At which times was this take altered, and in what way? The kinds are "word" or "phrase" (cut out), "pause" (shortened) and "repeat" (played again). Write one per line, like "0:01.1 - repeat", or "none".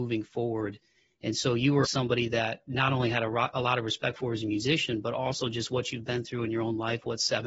0:01.8 - word